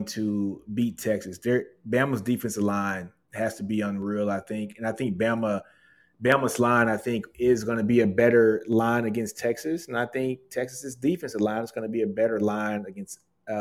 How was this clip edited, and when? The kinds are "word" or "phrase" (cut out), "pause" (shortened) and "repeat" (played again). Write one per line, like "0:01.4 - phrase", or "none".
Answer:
none